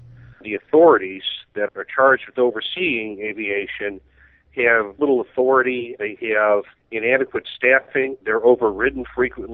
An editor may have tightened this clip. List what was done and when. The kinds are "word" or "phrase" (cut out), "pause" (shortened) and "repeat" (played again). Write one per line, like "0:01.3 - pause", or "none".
0:01.7 - word
0:05.0 - word
0:06.7 - pause
0:08.2 - pause